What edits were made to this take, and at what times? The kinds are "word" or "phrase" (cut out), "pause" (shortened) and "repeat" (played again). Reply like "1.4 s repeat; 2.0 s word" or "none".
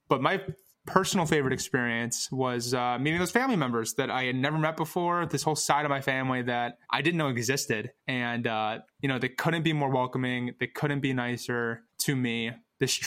6.8 s pause; 8.0 s pause; 8.9 s pause; 11.9 s pause